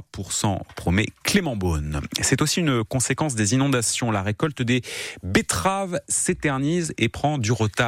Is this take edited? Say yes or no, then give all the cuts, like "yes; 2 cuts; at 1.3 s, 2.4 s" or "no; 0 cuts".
no; 0 cuts